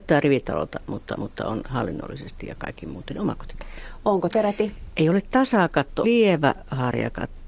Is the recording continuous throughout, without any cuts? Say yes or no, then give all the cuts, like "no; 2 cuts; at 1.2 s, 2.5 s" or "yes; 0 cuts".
no; 3 cuts; at 1.1 s, 4.3 s, 6.0 s